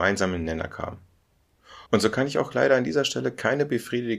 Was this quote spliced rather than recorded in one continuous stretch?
yes; 1 cut; at 1.9 s

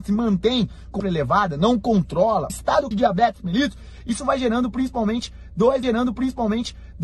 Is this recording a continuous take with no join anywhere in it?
no; 4 cuts; at 1.0 s, 2.5 s, 2.9 s, 5.8 s

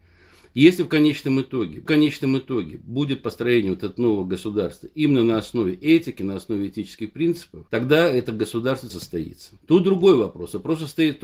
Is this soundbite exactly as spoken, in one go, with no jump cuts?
no; 4 cuts; at 1.9 s, 7.7 s, 8.9 s, 9.6 s

